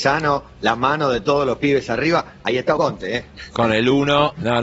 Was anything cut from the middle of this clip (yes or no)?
yes